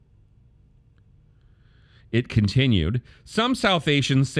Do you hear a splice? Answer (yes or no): no